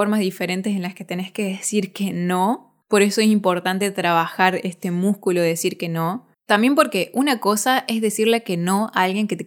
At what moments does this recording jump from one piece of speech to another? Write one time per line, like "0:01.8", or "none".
0:02.8
0:06.3